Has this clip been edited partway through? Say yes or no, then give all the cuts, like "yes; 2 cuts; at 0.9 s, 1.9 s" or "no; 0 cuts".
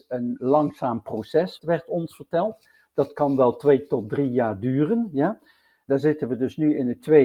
no; 0 cuts